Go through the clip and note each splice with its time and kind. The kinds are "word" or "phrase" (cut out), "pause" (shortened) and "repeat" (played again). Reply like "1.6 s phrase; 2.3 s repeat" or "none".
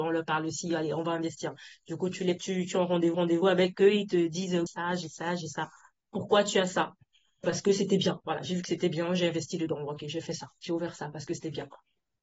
2.4 s word; 3.1 s repeat; 4.7 s phrase; 7.4 s word